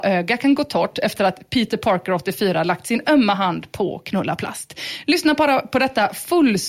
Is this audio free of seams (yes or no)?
yes